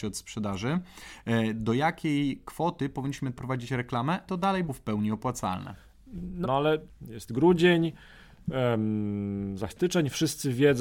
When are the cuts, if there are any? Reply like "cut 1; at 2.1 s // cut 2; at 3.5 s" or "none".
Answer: cut 1; at 3.4 s // cut 2; at 4.3 s // cut 3; at 4.7 s // cut 4; at 6.4 s // cut 5; at 9.7 s